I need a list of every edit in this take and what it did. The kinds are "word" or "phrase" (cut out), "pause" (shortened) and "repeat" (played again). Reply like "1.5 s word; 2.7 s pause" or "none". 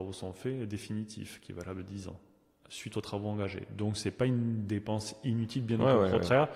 none